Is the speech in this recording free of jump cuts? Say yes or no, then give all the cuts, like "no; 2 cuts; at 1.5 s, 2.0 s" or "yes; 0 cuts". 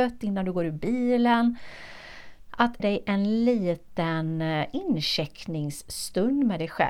no; 1 cut; at 2.8 s